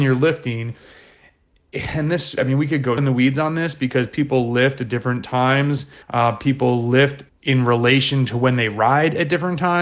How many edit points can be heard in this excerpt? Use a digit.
4